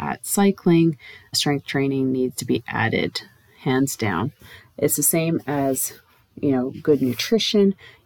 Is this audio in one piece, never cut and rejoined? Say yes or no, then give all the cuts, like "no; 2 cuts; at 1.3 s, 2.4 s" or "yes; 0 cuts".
no; 1 cut; at 1.3 s